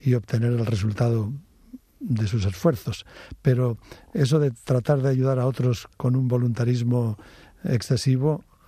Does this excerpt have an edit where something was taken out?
no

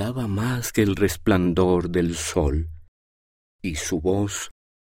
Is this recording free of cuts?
yes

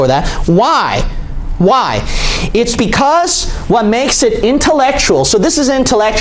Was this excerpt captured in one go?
yes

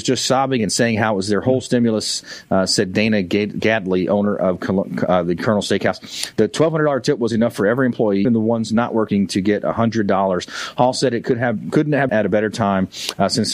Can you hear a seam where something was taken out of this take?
yes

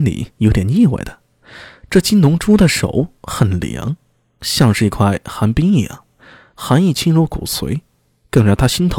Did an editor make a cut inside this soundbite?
no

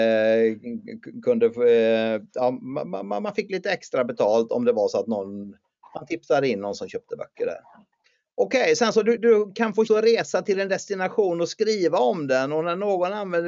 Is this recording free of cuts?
no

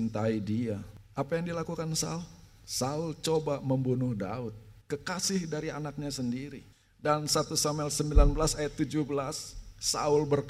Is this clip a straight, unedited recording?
no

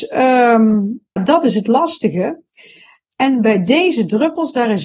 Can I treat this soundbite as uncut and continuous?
no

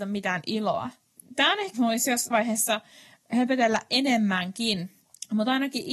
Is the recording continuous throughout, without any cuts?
no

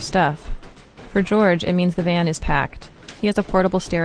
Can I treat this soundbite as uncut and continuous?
no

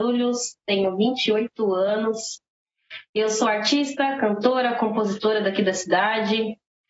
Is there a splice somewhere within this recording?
no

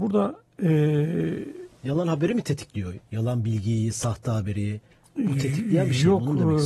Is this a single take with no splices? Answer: yes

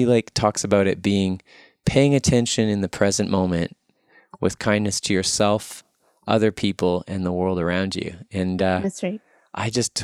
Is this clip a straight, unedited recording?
yes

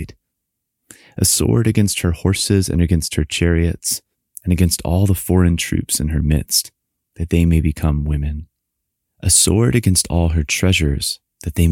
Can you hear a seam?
no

